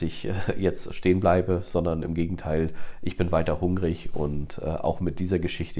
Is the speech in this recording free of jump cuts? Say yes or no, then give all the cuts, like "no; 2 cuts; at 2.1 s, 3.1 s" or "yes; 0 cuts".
yes; 0 cuts